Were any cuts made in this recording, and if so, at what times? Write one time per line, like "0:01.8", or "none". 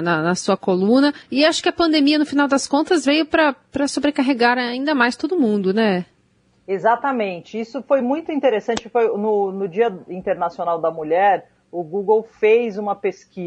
0:01.2
0:06.4